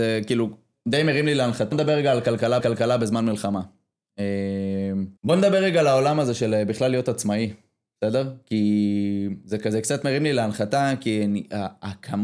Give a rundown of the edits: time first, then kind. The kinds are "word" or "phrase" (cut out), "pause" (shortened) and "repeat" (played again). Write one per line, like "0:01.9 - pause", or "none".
0:01.7 - word
0:02.6 - repeat
0:05.2 - pause